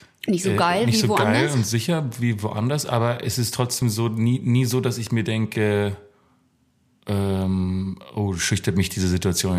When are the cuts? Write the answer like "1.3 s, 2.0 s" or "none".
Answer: none

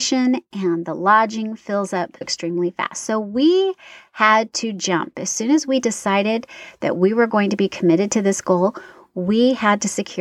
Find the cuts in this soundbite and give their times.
2.2 s

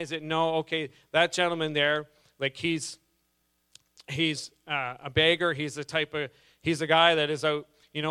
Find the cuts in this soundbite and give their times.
none

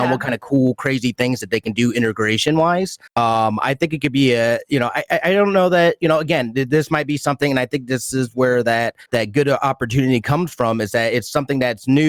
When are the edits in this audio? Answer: 3.1 s, 9.1 s

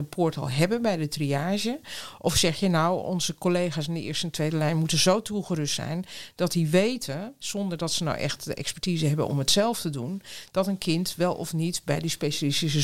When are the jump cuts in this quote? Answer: none

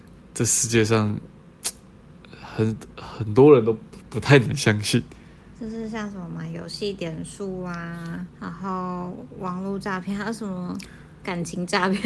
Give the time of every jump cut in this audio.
4.0 s, 8.3 s

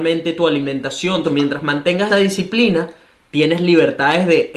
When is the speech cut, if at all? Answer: 1.2 s, 2.1 s

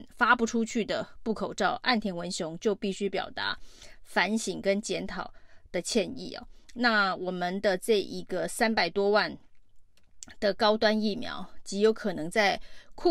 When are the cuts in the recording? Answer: 6.6 s

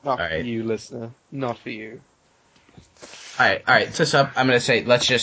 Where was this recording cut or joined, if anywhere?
4.0 s

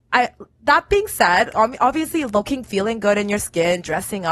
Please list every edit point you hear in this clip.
1.5 s, 2.6 s

